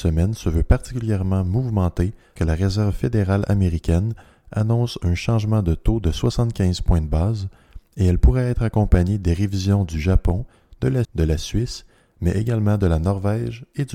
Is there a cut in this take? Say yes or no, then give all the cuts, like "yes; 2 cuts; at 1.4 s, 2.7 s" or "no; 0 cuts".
yes; 2 cuts; at 2.4 s, 11.0 s